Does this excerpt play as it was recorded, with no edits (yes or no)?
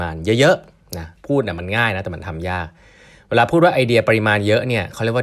yes